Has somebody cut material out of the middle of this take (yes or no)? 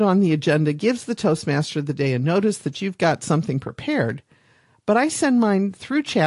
no